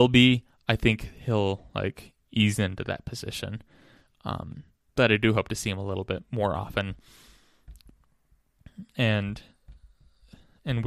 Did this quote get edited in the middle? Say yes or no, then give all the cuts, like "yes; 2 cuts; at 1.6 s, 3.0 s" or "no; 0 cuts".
no; 0 cuts